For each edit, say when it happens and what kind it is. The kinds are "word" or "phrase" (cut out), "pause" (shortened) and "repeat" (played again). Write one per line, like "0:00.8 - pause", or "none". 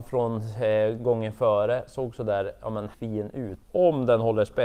0:02.9 - word
0:03.6 - pause